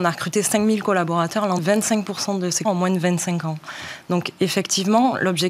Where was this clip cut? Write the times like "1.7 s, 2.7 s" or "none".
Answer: 1.6 s, 2.6 s